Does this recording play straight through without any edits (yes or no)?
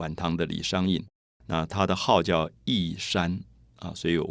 yes